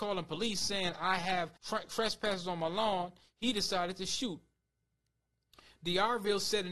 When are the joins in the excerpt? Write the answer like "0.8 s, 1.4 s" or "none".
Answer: 1.6 s